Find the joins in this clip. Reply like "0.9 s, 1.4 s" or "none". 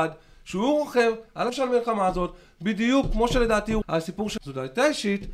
1.5 s, 3.8 s, 4.4 s